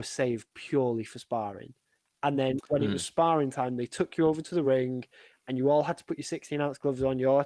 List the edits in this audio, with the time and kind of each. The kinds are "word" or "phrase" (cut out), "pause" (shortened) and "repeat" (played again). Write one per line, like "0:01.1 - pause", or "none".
none

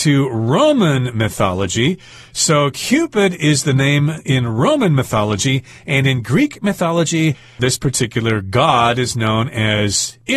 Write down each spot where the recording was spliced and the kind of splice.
none

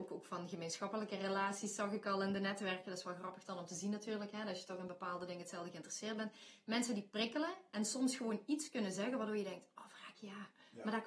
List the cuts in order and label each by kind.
none

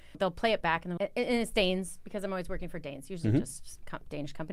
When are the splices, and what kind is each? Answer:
0:01.0 - word

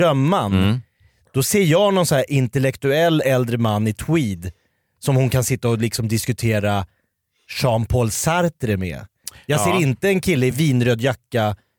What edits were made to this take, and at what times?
none

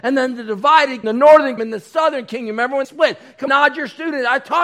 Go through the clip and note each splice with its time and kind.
0:01.0 - word
0:01.6 - word
0:02.8 - word
0:03.5 - word

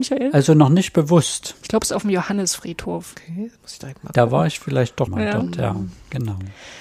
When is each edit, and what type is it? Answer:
0:01.6 - pause
0:05.1 - word

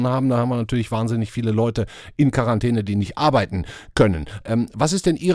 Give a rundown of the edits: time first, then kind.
none

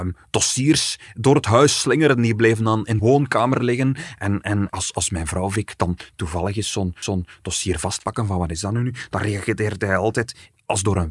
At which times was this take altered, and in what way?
0:03.0 - word
0:04.7 - word
0:07.0 - repeat

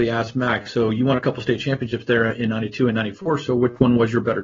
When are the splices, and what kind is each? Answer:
none

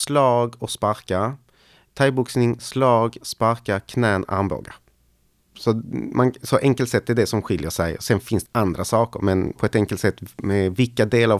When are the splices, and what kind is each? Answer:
0:08.4 - word
0:09.6 - word

